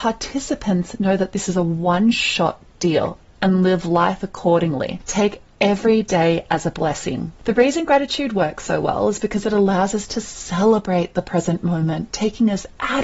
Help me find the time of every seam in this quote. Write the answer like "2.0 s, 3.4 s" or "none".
7.4 s